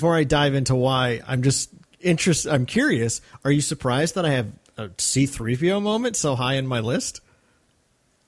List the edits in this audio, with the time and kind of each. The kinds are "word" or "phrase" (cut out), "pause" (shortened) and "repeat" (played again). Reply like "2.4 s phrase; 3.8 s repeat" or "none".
none